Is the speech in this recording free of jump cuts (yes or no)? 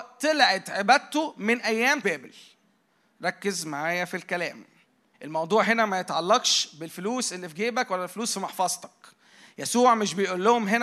no